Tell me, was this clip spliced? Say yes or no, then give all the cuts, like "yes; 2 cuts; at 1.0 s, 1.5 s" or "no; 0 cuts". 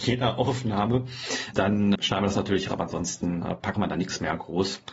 yes; 4 cuts; at 1.5 s, 2.0 s, 2.7 s, 3.7 s